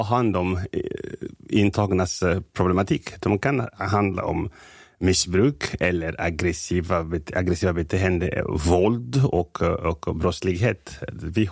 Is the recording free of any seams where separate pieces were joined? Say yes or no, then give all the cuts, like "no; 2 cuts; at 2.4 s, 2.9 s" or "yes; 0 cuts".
yes; 0 cuts